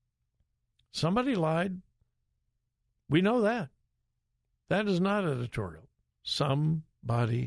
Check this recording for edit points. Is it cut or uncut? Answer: uncut